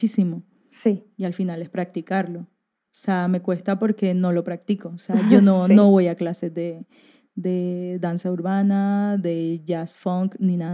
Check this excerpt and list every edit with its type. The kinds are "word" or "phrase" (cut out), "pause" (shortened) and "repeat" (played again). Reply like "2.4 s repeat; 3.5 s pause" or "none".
none